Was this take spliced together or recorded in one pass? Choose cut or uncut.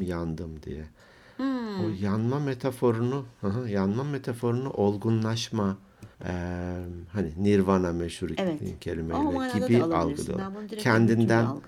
cut